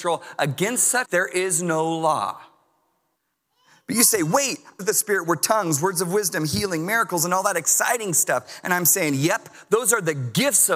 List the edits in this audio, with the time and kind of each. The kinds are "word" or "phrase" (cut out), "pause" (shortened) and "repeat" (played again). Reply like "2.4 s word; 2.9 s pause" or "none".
1.1 s word; 3.2 s pause; 4.8 s phrase